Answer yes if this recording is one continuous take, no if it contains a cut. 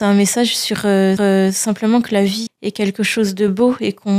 no